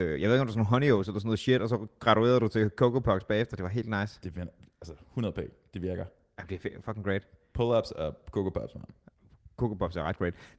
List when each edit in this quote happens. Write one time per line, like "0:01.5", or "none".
none